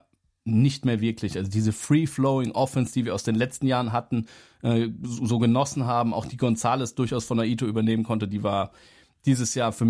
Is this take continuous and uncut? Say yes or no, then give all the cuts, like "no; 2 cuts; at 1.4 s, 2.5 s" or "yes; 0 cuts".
yes; 0 cuts